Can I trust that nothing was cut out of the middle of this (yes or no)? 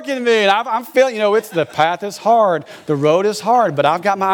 yes